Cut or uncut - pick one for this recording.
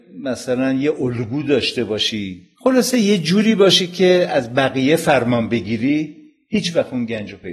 cut